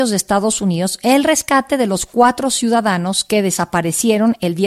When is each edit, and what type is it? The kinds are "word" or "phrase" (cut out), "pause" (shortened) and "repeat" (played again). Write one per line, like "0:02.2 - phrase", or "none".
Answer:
none

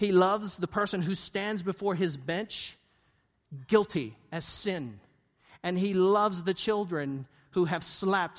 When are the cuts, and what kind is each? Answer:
none

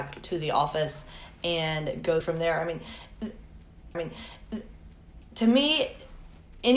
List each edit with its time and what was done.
0:02.2 - word
0:03.9 - repeat

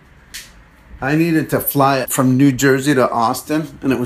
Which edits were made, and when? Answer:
0:02.0 - word

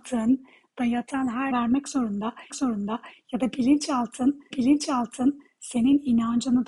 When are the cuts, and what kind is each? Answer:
0:01.5 - phrase
0:02.5 - repeat
0:04.5 - repeat

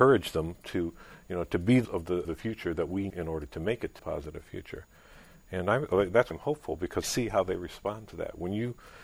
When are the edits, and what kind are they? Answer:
0:01.8 - word
0:02.2 - word
0:03.1 - word
0:04.0 - word
0:06.3 - word
0:07.0 - word

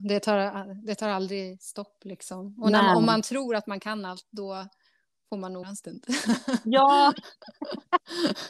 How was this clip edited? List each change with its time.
0:05.6 - word

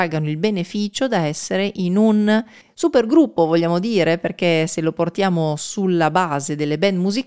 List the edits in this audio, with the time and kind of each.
0:02.6 - pause

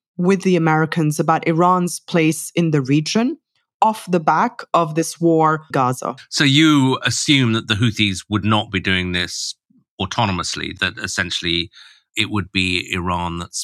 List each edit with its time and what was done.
0:05.7 - phrase

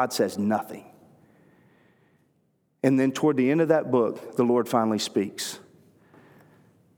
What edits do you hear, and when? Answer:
none

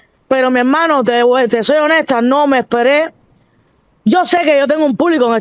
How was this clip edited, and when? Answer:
none

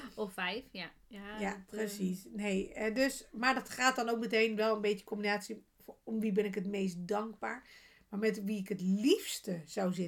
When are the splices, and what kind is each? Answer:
none

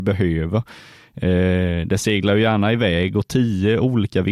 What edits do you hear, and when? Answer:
none

